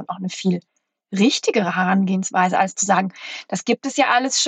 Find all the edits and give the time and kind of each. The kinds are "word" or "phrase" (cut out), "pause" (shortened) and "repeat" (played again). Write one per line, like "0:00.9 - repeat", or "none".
none